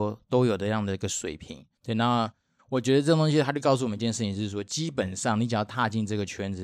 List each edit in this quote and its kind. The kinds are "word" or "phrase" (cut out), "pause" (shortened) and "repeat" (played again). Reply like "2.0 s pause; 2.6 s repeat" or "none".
1.7 s pause

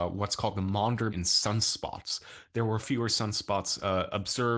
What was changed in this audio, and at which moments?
1.1 s word; 2.8 s word

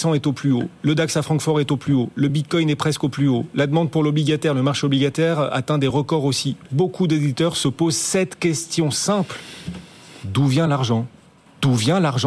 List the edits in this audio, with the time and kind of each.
none

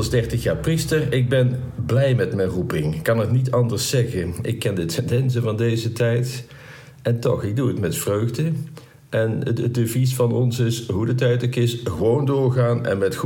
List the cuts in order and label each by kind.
none

